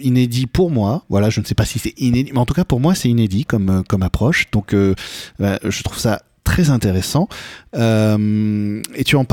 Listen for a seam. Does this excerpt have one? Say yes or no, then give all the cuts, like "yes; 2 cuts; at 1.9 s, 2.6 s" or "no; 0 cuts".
no; 0 cuts